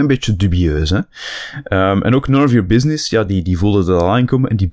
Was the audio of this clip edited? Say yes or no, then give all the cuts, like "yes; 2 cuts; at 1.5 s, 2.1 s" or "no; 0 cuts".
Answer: no; 0 cuts